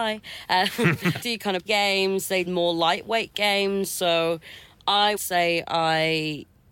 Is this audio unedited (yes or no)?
no